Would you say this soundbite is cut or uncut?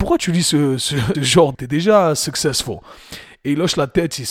cut